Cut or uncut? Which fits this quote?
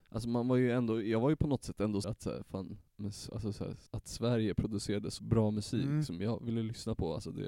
cut